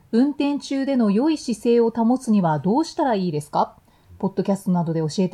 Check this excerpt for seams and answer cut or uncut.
uncut